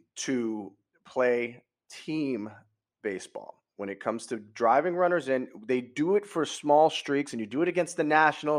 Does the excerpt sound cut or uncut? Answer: uncut